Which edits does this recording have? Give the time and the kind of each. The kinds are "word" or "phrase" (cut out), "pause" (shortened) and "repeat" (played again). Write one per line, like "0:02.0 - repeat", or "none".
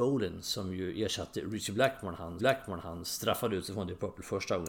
0:02.4 - repeat